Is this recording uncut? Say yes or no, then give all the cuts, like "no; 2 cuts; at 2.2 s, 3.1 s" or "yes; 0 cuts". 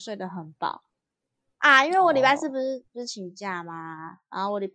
yes; 0 cuts